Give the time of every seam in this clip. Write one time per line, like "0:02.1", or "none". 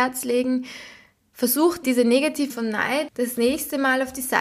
0:01.8
0:02.5
0:03.1